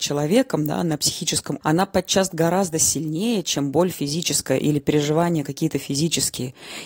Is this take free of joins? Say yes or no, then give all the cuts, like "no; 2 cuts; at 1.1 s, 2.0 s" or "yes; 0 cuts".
no; 1 cut; at 1.6 s